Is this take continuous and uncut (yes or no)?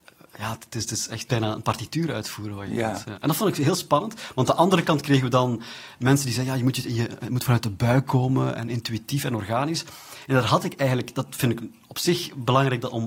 yes